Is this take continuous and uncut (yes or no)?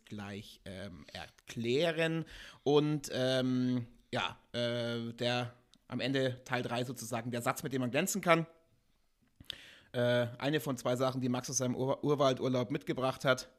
yes